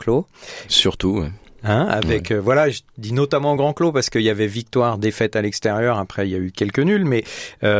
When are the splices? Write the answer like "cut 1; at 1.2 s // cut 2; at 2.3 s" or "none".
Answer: none